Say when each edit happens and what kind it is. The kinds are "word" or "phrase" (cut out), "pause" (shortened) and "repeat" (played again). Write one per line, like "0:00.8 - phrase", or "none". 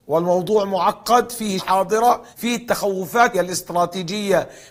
0:01.6 - word
0:02.3 - pause
0:03.3 - word